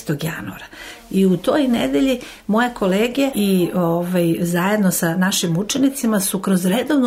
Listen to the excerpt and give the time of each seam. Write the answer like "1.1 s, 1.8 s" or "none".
3.3 s